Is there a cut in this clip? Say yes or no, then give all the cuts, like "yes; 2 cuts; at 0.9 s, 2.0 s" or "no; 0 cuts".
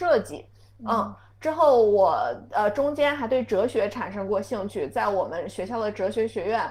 no; 0 cuts